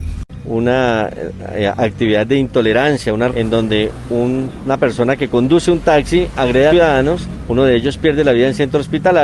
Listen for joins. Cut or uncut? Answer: cut